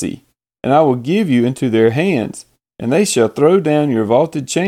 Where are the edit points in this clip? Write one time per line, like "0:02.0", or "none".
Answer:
none